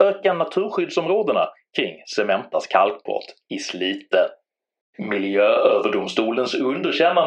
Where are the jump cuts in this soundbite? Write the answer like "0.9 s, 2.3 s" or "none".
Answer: none